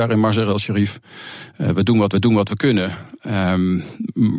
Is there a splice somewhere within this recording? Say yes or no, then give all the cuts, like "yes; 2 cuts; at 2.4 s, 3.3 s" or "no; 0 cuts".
yes; 1 cut; at 2.1 s